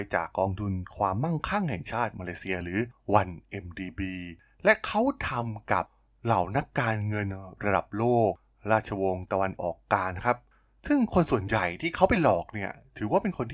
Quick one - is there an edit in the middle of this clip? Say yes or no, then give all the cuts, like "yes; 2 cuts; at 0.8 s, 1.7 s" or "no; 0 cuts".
no; 0 cuts